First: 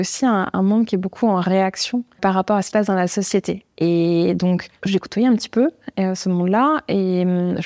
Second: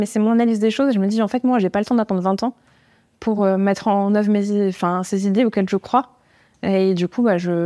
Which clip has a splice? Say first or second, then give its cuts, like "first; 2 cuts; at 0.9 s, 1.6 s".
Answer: first; 3 cuts; at 2.2 s, 2.7 s, 4.8 s